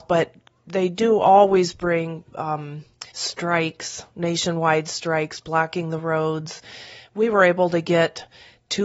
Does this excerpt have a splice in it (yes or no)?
yes